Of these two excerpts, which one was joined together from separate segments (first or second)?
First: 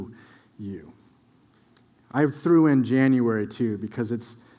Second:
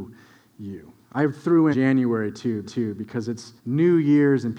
second